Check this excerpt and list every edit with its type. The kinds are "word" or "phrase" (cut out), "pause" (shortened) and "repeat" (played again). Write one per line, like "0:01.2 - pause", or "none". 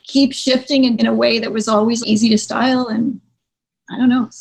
0:01.0 - word
0:02.0 - word

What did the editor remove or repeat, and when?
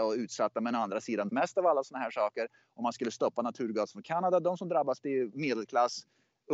0:01.3 - phrase
0:05.0 - word

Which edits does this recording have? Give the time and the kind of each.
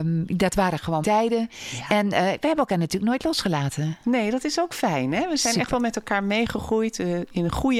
0:01.0 - word

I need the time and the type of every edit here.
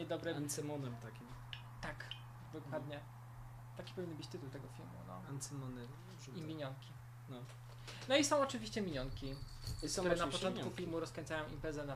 none

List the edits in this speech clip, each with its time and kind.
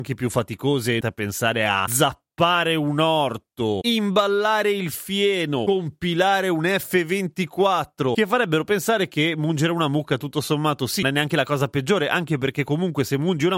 0:01.0 - phrase
0:11.0 - phrase

